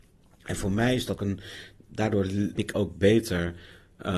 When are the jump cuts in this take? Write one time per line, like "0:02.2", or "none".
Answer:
0:01.2
0:02.6